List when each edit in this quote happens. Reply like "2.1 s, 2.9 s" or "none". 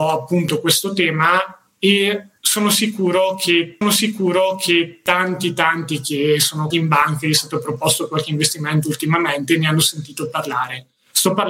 3.8 s, 6.7 s